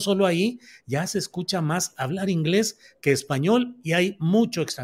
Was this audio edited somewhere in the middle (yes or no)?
no